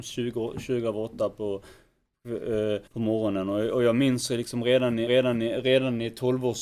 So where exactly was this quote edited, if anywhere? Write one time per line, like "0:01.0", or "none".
0:02.9
0:05.1